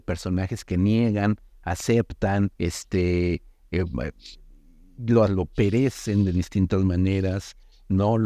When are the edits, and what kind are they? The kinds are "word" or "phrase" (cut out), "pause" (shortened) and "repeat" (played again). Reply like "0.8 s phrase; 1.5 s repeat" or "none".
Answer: 2.5 s pause; 5.3 s phrase